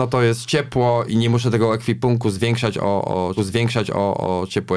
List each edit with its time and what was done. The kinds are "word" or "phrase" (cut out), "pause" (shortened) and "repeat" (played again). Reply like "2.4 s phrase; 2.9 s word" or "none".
1.1 s word; 3.4 s repeat